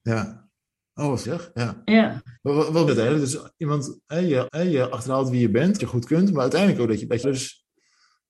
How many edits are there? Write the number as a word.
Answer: six